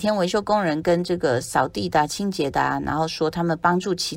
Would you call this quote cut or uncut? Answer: uncut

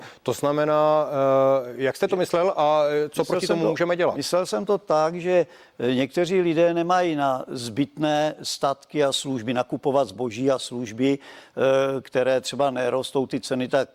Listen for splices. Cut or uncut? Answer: uncut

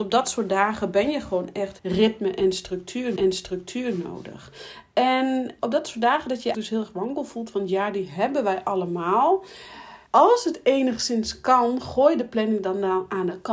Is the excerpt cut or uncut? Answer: cut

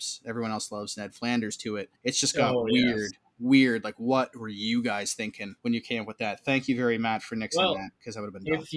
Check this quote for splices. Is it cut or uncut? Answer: cut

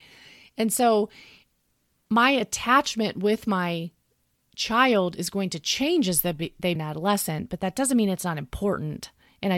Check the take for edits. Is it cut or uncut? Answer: cut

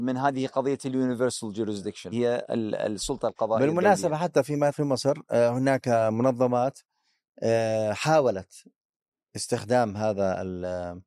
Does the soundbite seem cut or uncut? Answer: cut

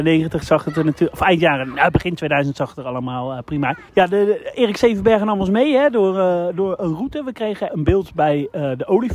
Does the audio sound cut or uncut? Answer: cut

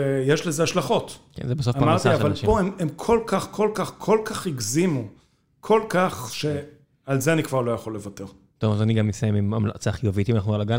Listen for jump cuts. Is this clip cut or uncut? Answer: uncut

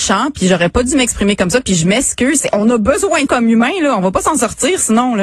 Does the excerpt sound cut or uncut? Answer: cut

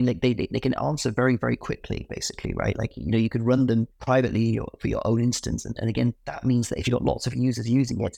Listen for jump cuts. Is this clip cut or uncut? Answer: uncut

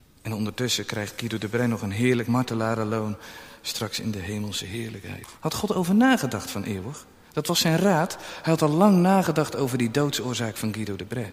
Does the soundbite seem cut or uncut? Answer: cut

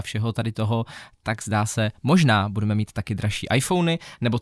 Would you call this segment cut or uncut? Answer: uncut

